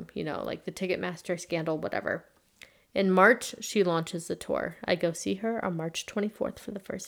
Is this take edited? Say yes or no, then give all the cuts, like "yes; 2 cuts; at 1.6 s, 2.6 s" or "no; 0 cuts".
no; 0 cuts